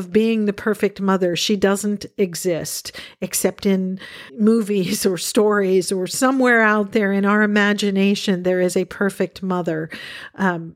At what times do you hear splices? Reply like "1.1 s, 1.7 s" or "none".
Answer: 4.3 s